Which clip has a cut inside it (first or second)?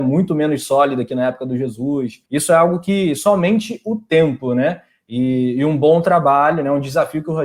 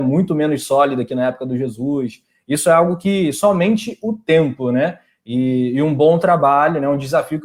first